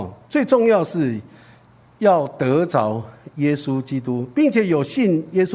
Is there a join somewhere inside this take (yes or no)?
no